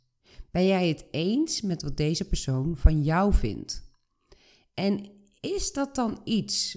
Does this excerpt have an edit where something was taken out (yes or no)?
no